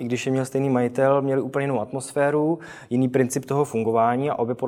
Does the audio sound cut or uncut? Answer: uncut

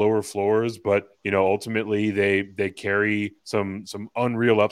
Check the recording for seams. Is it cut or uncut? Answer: cut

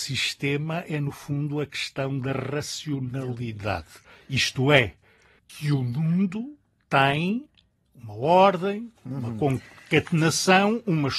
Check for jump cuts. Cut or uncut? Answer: uncut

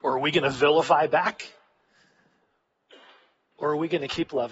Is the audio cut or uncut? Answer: uncut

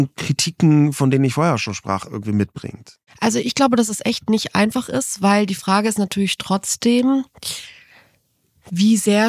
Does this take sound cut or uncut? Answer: uncut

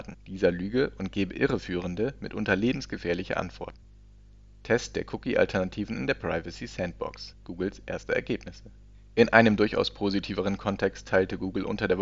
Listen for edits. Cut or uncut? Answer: uncut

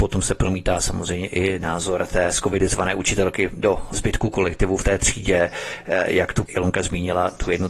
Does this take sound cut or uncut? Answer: uncut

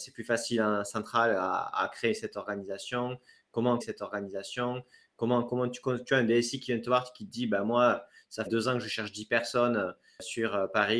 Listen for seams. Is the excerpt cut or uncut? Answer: cut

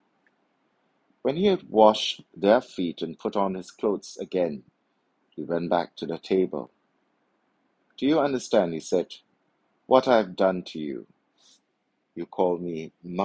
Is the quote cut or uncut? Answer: uncut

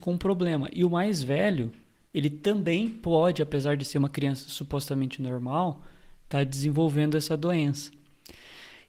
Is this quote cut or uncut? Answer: uncut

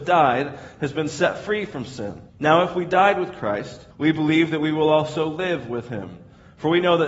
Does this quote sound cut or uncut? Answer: cut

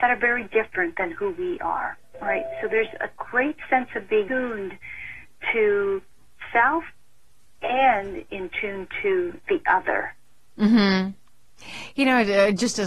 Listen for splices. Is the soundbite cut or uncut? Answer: cut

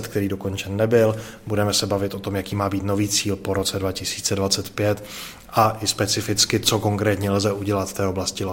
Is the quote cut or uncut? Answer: uncut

